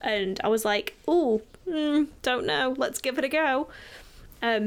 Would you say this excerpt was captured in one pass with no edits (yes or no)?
yes